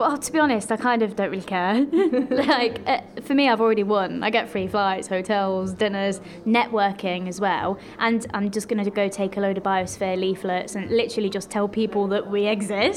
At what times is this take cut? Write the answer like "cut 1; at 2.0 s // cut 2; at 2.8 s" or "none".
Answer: none